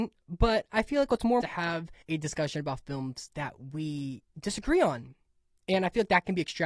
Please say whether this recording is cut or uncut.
cut